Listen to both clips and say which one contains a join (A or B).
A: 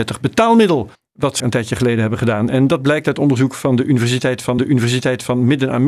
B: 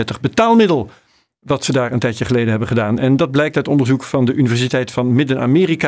A